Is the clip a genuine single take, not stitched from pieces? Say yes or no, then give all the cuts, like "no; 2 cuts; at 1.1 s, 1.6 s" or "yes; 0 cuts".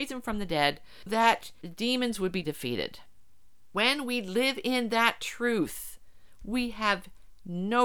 no; 2 cuts; at 1.1 s, 2.4 s